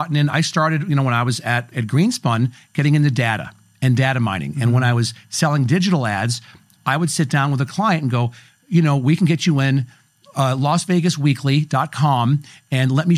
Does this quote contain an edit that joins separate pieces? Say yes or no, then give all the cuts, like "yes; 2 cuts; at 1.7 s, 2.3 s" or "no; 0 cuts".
yes; 1 cut; at 1.7 s